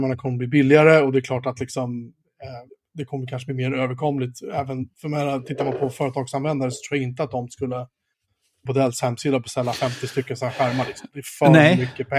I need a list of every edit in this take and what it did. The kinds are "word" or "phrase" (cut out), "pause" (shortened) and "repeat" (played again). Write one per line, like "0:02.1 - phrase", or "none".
0:02.7 - pause
0:08.7 - phrase